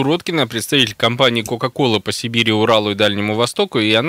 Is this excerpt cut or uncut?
uncut